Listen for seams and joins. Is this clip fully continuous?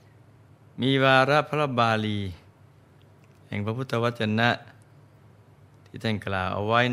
yes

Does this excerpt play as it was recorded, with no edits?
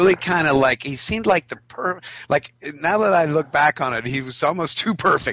yes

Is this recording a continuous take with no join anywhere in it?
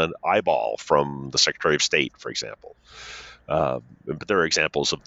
yes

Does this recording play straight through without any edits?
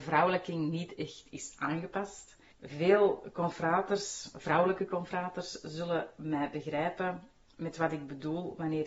no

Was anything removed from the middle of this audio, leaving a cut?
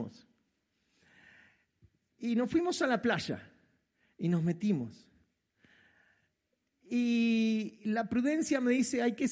no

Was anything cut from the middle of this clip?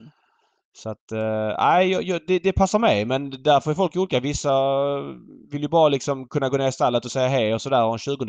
yes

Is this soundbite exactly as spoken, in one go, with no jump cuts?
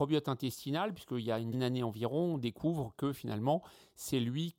no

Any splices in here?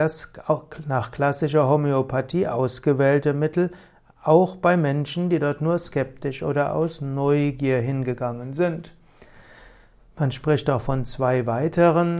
no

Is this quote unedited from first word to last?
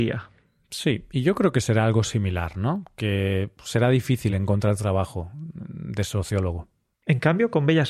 yes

